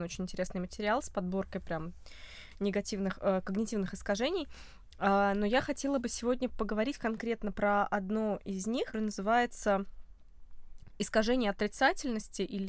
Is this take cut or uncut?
cut